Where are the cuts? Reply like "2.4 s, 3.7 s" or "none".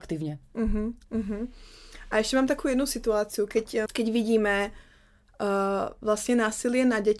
1.0 s, 3.9 s